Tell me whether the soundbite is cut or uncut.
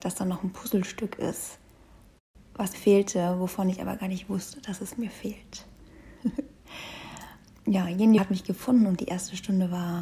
cut